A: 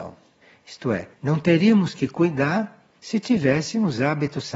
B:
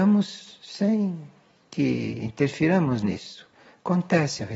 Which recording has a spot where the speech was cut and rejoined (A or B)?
A